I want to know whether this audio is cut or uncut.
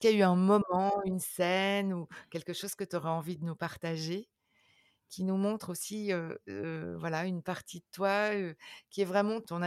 uncut